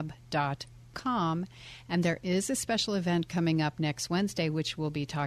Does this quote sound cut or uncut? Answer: uncut